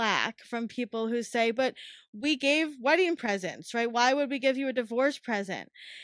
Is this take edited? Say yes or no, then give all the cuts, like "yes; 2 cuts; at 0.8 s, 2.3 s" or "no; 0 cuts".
no; 0 cuts